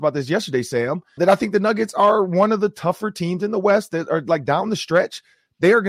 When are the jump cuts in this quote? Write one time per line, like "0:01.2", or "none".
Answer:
0:01.2